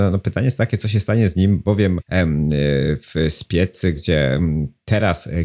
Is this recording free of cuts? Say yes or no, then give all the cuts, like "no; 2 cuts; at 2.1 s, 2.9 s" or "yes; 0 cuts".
no; 2 cuts; at 2.0 s, 3.9 s